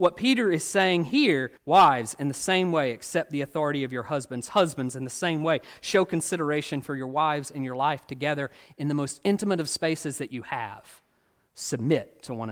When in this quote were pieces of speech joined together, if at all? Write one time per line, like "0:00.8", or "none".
0:01.6